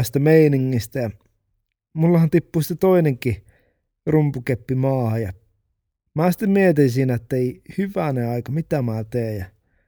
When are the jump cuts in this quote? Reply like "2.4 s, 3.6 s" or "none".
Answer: none